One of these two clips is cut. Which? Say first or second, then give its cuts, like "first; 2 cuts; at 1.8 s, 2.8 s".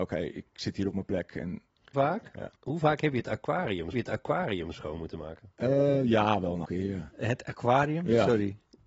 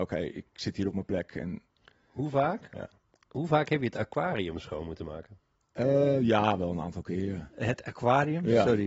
first; 5 cuts; at 1.9 s, 2.5 s, 3.9 s, 5.5 s, 6.6 s